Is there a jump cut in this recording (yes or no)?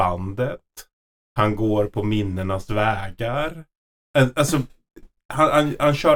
no